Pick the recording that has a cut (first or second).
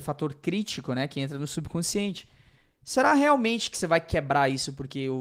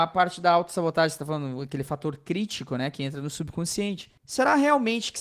second